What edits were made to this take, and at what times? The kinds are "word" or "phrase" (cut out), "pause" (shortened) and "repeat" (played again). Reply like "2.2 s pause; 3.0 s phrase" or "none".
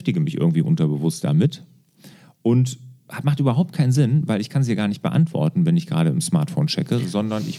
none